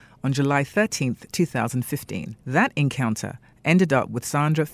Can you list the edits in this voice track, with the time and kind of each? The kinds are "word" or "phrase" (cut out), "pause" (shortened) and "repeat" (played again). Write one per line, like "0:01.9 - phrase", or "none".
0:02.4 - pause